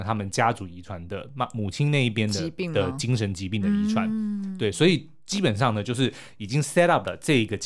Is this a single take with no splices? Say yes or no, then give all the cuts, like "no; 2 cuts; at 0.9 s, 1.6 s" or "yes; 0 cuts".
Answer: yes; 0 cuts